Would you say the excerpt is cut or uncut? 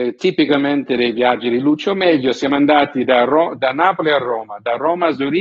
uncut